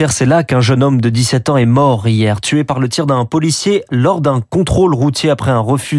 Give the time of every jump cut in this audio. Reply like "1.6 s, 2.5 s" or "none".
none